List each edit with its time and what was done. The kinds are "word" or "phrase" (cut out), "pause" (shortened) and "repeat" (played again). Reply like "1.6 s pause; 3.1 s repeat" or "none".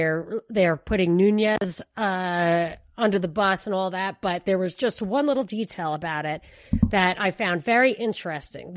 none